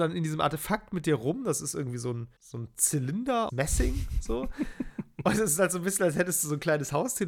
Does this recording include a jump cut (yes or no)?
yes